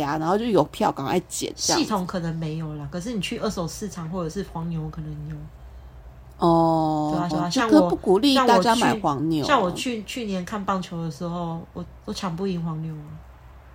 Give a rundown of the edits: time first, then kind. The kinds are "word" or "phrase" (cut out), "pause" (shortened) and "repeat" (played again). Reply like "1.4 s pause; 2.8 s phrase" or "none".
7.3 s repeat